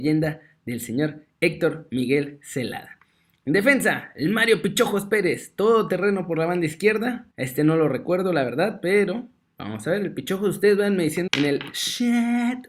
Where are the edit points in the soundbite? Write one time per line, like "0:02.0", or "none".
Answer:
0:07.3
0:11.3